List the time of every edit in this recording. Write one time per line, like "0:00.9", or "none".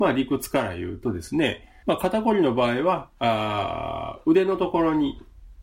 0:01.8